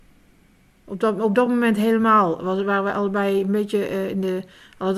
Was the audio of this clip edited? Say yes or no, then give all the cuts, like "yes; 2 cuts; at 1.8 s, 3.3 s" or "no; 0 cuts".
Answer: no; 0 cuts